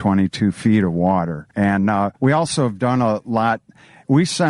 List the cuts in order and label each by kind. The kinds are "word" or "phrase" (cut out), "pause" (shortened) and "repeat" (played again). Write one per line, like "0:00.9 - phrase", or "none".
0:01.5 - pause
0:02.2 - pause